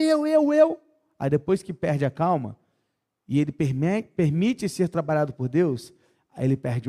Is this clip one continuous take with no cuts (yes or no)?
yes